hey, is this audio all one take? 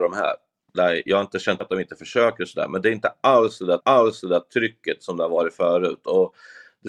no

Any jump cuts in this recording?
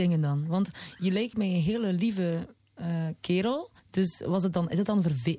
yes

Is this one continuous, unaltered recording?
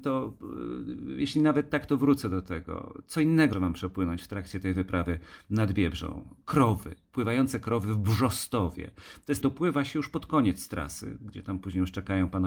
no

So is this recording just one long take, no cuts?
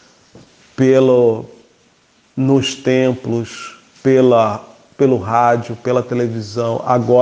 yes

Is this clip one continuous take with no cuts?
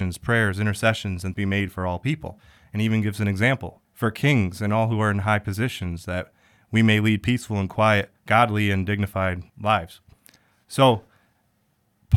no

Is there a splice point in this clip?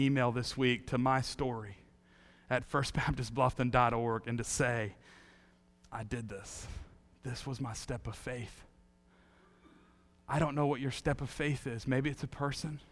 no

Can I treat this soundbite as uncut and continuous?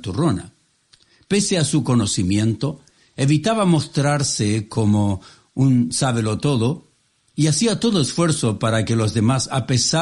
yes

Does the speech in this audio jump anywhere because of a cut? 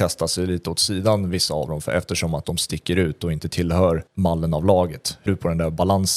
yes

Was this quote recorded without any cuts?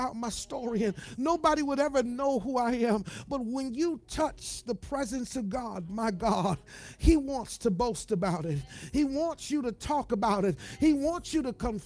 yes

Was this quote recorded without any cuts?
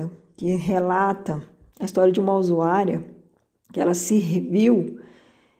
yes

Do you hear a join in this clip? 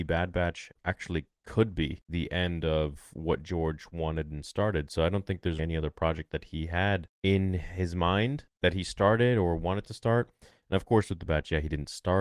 yes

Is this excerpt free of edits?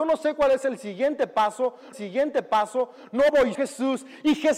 no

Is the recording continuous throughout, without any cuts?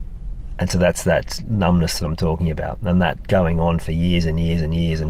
yes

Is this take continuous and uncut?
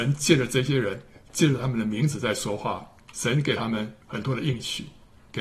no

